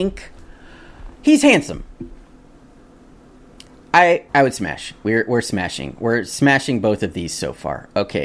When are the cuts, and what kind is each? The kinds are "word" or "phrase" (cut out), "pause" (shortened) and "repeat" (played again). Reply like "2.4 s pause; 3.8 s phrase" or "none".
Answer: 1.1 s pause; 4.3 s pause